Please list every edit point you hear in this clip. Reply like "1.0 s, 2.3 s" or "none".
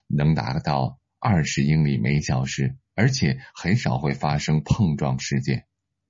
2.8 s

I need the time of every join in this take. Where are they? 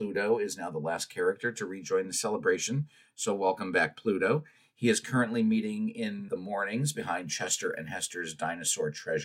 6.3 s

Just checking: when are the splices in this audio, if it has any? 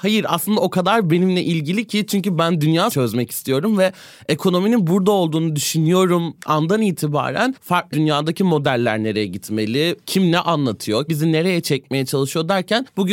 2.9 s, 6.4 s, 7.9 s, 11.1 s

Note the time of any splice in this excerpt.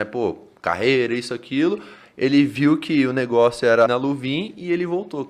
3.9 s

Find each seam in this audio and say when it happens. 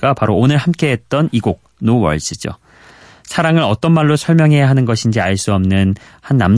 none

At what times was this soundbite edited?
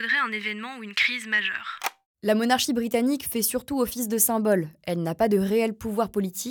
none

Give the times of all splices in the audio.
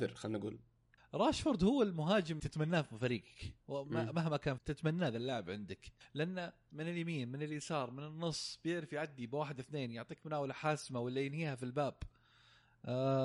1.0 s, 2.4 s, 4.6 s, 6.0 s

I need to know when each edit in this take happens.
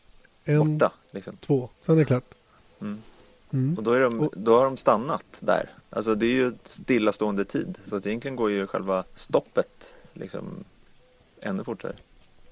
1.7 s, 9.1 s

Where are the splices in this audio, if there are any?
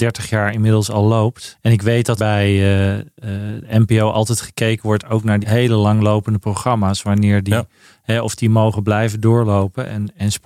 2.2 s, 5.4 s

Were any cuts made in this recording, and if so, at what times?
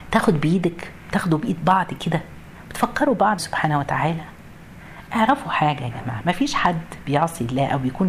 3.4 s

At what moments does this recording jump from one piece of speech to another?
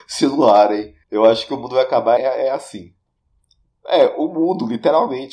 1.0 s, 2.2 s

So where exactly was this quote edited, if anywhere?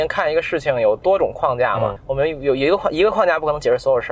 2.0 s

